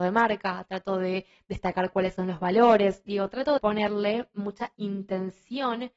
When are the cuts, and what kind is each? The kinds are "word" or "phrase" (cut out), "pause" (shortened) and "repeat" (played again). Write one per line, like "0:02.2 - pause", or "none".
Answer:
0:03.6 - word